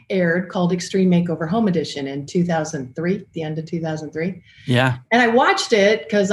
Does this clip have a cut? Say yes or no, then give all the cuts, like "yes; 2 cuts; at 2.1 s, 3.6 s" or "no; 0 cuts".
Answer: yes; 1 cut; at 5.1 s